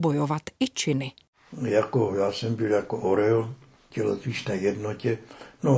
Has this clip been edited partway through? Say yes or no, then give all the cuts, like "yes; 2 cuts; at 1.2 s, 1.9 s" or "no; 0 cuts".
no; 0 cuts